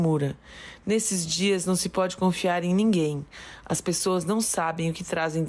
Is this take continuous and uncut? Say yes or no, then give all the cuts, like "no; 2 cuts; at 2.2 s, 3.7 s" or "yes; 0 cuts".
yes; 0 cuts